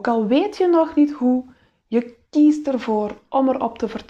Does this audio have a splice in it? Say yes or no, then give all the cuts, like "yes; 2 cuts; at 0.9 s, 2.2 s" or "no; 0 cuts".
no; 0 cuts